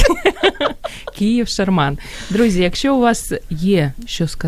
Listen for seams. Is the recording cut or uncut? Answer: uncut